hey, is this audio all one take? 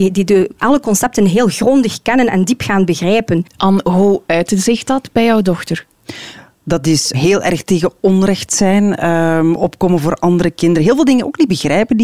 no; 1 cut; at 7.1 s

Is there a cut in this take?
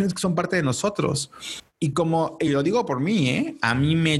no; 0 cuts

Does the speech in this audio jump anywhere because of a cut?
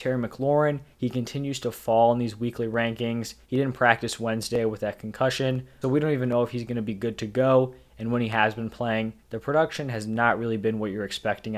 yes; 4 cuts; at 0.9 s, 3.4 s, 5.8 s, 9.2 s

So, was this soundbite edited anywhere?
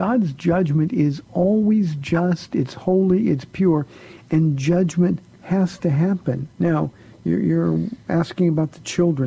yes; 1 cut; at 6.5 s

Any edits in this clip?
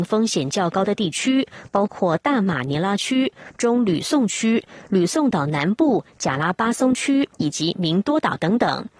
yes; 1 cut; at 7.3 s

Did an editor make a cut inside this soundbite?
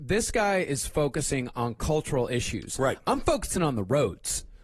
no; 0 cuts

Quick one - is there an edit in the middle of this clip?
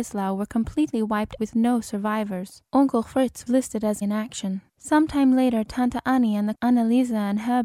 yes; 6 cuts; at 1.4 s, 2.7 s, 3.5 s, 4.0 s, 4.7 s, 6.5 s

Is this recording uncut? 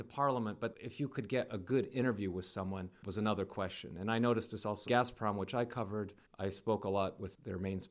no; 1 cut; at 4.9 s

